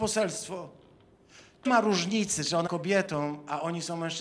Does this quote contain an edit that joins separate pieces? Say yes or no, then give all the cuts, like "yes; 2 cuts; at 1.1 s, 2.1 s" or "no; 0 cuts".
yes; 2 cuts; at 1.7 s, 2.7 s